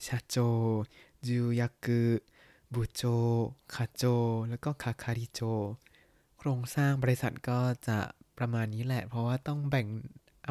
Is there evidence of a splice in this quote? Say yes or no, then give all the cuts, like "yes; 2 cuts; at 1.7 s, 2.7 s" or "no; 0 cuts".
no; 0 cuts